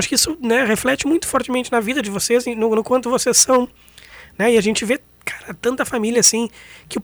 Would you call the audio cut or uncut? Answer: uncut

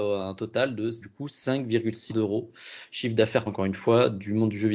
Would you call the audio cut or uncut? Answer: cut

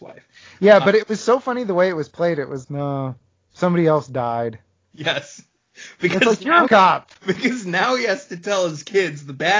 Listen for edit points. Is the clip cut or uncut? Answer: cut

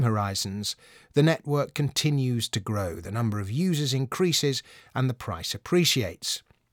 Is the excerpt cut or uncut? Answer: uncut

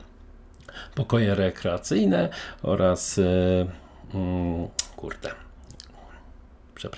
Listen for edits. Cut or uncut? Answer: uncut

